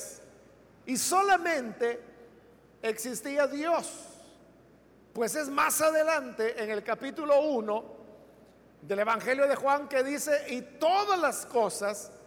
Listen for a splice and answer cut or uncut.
uncut